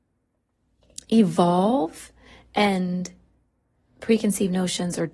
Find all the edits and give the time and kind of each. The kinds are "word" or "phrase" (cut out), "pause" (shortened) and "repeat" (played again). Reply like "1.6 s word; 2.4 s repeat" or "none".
4.0 s phrase

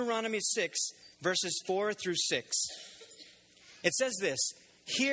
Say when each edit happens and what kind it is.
1.1 s pause

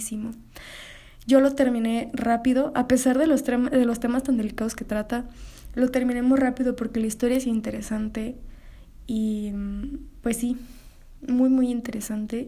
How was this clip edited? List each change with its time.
none

